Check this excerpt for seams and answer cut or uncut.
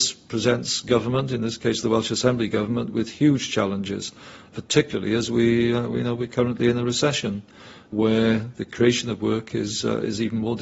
uncut